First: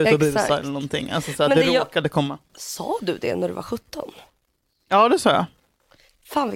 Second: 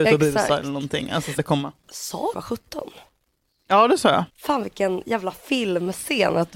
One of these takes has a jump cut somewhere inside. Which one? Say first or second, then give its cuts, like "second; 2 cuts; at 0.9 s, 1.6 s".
second; 3 cuts; at 1.4 s, 2.3 s, 4.3 s